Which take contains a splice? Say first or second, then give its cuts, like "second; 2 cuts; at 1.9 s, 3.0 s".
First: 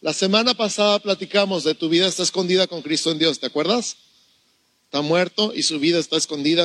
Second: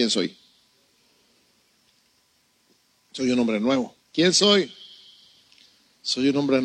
second; 1 cut; at 4.0 s